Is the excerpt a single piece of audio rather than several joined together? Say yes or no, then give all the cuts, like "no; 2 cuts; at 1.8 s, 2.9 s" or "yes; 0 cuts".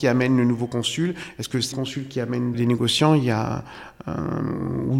no; 2 cuts; at 1.7 s, 2.5 s